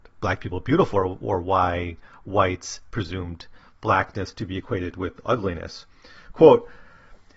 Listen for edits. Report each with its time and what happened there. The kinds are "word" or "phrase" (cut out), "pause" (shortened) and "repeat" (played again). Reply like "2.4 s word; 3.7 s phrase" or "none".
none